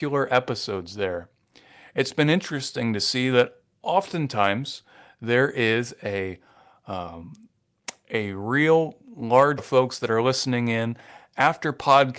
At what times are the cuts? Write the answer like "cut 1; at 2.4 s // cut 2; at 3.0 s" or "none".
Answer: cut 1; at 9.6 s